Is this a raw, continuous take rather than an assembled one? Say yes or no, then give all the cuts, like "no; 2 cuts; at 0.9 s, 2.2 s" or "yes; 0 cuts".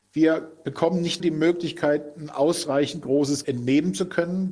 no; 2 cuts; at 1.2 s, 3.4 s